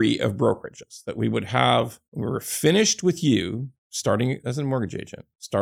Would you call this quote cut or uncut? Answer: uncut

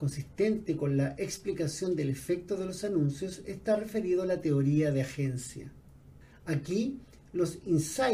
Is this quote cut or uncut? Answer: cut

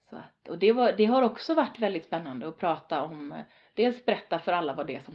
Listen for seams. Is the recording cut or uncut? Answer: uncut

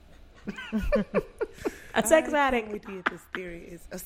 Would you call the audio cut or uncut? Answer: cut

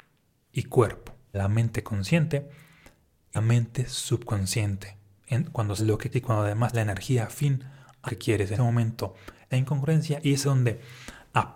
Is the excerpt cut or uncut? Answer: cut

